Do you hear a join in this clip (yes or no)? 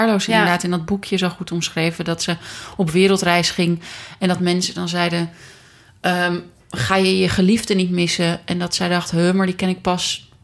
no